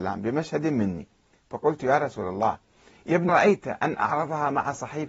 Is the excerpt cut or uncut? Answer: cut